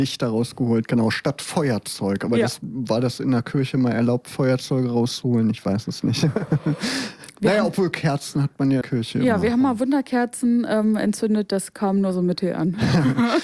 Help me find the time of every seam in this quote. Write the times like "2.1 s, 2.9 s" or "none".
8.8 s